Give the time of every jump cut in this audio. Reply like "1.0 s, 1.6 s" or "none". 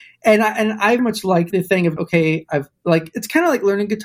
1.0 s, 1.5 s, 2.0 s